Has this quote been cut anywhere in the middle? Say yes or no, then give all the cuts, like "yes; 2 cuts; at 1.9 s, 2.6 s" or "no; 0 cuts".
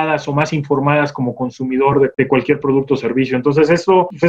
no; 0 cuts